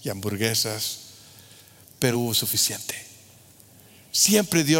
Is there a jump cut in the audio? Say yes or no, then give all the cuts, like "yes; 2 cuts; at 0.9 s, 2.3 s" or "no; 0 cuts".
yes; 1 cut; at 2.1 s